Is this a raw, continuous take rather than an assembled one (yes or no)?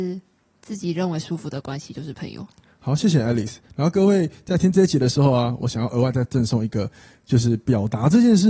yes